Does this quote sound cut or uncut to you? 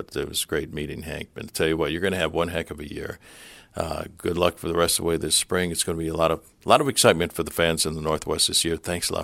uncut